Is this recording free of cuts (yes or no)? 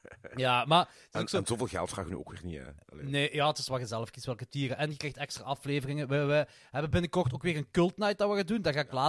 yes